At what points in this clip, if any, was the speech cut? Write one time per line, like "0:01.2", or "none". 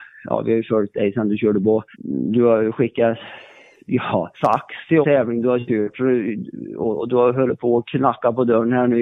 0:01.6
0:01.9
0:04.3
0:05.0